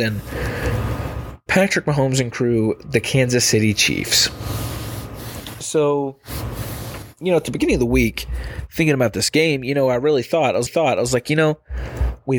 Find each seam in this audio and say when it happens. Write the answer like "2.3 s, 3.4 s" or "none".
10.7 s